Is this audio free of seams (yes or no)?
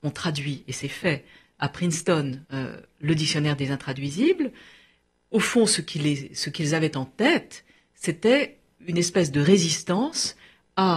no